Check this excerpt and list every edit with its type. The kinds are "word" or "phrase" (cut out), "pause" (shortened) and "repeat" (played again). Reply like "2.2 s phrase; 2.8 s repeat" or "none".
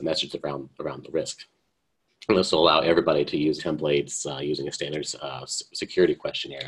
3.6 s word